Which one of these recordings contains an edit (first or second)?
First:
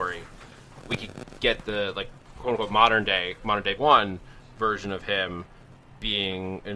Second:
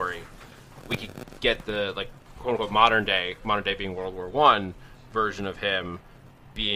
first